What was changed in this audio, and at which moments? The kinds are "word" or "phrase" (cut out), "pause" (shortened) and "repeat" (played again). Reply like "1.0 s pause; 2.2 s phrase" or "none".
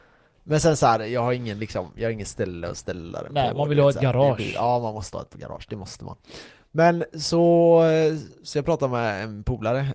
none